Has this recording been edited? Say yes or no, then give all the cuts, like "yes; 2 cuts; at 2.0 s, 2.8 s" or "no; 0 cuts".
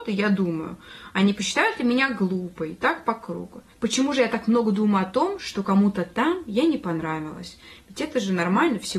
no; 0 cuts